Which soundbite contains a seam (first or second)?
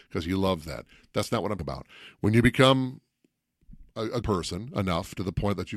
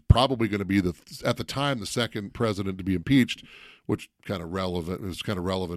first